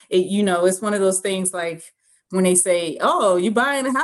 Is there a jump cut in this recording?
no; 0 cuts

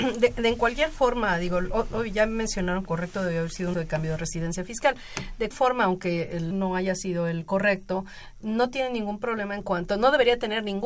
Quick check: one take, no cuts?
no; 4 cuts; at 2.8 s, 3.7 s, 5.5 s, 6.5 s

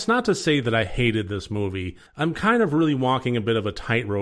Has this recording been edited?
yes; 1 cut; at 2.1 s

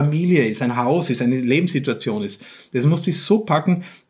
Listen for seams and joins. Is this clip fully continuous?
yes; 0 cuts

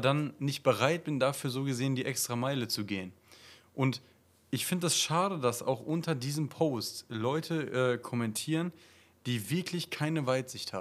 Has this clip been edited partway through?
no; 0 cuts

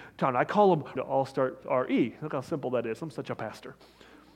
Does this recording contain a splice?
yes; 2 cuts; at 1.0 s, 1.6 s

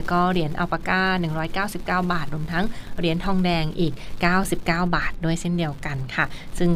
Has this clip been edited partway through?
no; 0 cuts

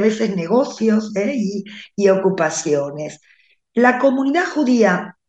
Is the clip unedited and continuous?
yes; 0 cuts

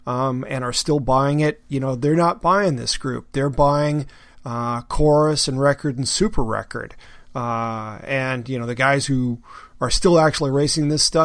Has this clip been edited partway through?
no; 0 cuts

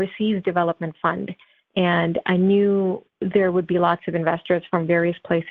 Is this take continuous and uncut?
yes; 0 cuts

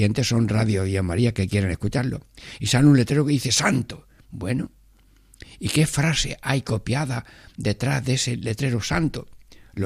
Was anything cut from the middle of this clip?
no; 0 cuts

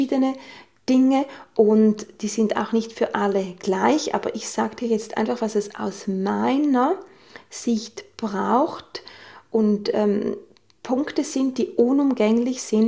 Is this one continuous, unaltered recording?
yes; 0 cuts

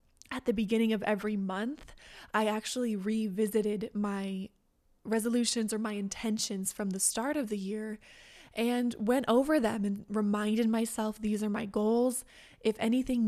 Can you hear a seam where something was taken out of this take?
no; 0 cuts

